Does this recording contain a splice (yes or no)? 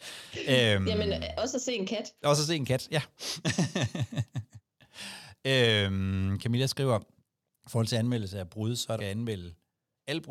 yes